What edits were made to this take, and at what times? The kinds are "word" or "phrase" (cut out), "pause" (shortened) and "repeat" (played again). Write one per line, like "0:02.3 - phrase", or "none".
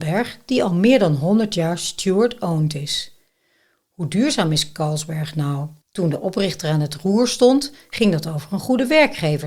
0:05.8 - pause